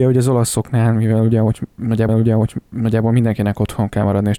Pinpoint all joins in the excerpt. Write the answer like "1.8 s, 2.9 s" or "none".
2.1 s